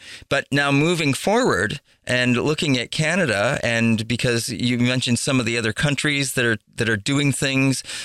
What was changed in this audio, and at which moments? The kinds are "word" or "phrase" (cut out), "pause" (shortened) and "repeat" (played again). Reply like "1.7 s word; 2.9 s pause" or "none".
none